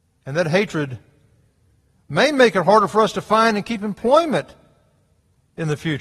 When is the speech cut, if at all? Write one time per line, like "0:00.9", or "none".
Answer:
none

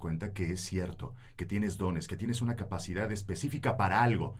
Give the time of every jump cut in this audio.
none

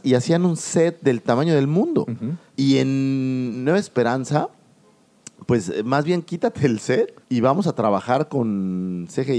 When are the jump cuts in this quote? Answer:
0:02.5
0:07.2

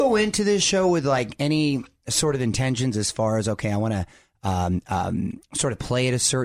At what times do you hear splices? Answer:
none

